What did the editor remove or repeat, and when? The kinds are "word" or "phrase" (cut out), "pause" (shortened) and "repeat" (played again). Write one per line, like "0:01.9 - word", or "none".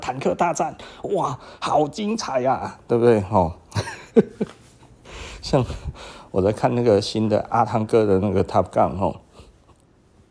0:04.1 - pause